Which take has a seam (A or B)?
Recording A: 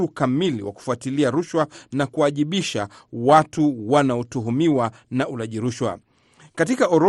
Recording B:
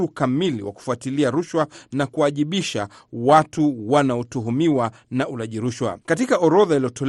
B